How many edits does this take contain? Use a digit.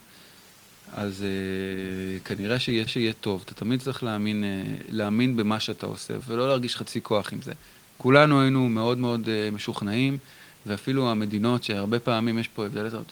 4